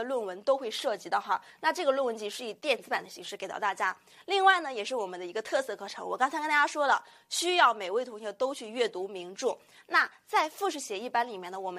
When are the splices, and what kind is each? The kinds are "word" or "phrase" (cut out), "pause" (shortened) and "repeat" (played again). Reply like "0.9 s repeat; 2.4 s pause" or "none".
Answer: none